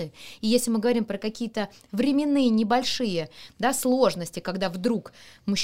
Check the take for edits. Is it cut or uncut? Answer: uncut